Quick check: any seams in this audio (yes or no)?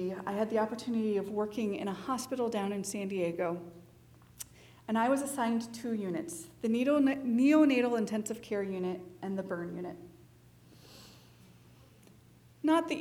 no